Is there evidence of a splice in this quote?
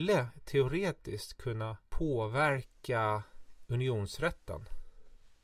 yes; 1 cut; at 1.9 s

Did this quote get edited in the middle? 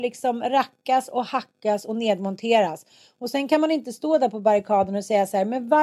no; 0 cuts

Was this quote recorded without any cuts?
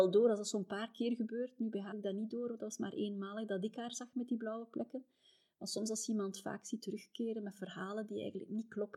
no; 1 cut; at 1.9 s

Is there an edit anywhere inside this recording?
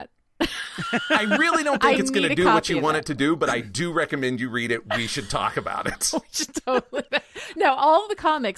yes; 1 cut; at 7.1 s

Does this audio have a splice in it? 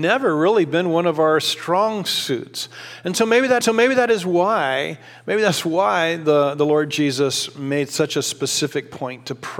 yes; 1 cut; at 3.6 s

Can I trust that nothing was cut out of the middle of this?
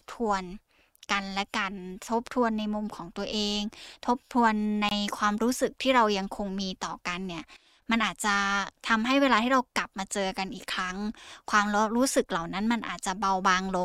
yes; 0 cuts

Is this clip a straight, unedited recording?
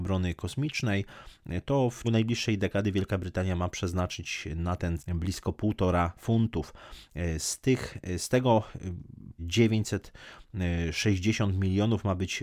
no; 4 cuts; at 2.0 s, 5.0 s, 6.2 s, 9.4 s

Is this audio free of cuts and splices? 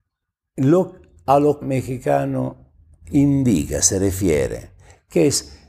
no; 1 cut; at 1.6 s

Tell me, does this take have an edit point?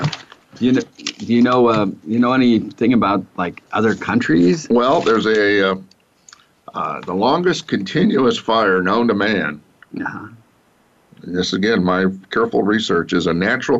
no; 0 cuts

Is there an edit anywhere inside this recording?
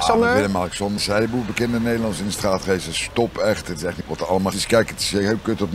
yes; 3 cuts; at 1.0 s, 4.0 s, 4.5 s

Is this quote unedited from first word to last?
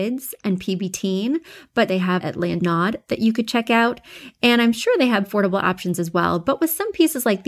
no; 4 cuts; at 1.9 s, 2.2 s, 2.6 s, 5.2 s

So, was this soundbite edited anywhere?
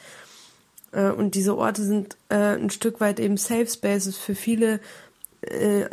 no; 0 cuts

